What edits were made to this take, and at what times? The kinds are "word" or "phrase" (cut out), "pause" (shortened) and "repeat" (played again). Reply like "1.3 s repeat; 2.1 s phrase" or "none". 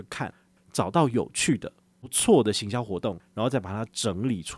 none